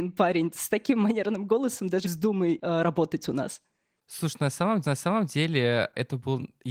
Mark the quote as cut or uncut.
cut